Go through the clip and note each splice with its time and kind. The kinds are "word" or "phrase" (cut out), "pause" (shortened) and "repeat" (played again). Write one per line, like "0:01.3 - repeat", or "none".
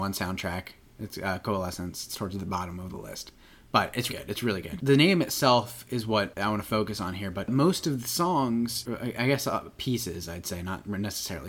0:04.1 - word